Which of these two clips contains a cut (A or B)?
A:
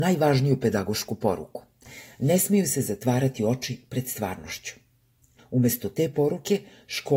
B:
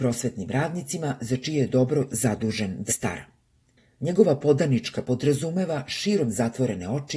B